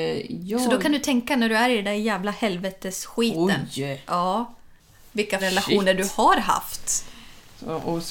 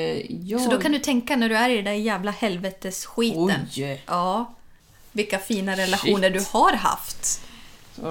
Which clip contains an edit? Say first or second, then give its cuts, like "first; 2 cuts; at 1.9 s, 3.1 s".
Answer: first; 1 cut; at 5.4 s